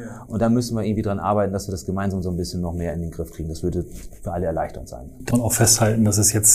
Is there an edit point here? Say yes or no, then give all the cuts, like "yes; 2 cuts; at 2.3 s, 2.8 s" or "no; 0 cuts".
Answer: yes; 1 cut; at 5.3 s